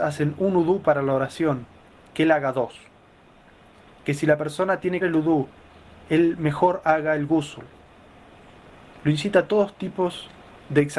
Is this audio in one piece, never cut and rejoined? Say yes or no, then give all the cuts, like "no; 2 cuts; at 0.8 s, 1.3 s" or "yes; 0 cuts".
no; 1 cut; at 5.0 s